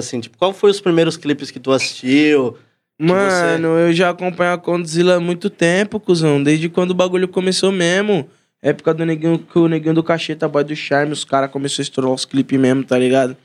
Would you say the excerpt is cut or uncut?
uncut